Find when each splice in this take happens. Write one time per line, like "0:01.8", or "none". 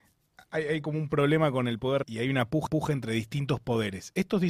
0:02.0
0:02.7